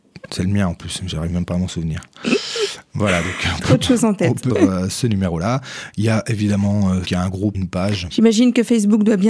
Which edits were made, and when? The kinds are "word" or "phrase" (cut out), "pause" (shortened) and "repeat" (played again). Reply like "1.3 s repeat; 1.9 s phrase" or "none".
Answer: 4.5 s word; 7.0 s word; 7.5 s word